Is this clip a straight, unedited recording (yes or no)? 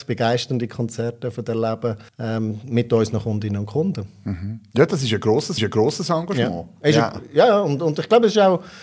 no